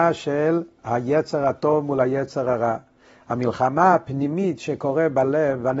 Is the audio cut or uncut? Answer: uncut